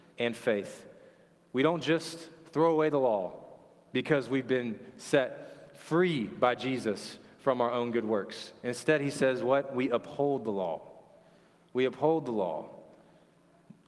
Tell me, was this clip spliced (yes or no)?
no